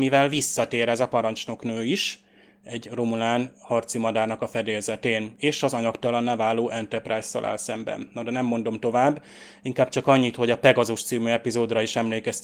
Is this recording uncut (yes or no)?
yes